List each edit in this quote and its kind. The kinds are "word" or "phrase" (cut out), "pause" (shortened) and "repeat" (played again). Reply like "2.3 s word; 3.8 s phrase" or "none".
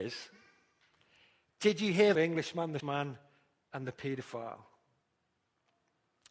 2.1 s phrase; 2.8 s word